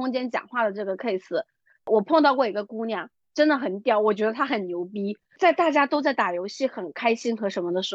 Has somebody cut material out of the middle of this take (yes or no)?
no